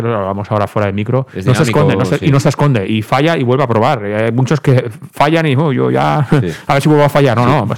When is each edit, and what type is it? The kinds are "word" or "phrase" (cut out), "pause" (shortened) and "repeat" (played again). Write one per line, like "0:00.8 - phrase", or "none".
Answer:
none